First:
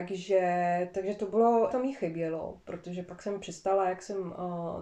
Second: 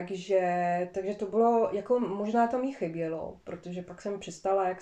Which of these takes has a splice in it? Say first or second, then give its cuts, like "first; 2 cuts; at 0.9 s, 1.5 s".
first; 1 cut; at 1.7 s